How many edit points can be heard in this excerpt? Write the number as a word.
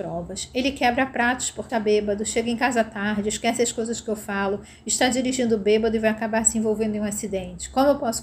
one